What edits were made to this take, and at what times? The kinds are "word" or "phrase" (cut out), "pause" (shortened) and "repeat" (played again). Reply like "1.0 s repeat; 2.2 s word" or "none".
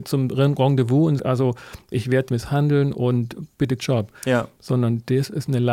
1.2 s word; 1.9 s word; 2.3 s phrase; 3.8 s phrase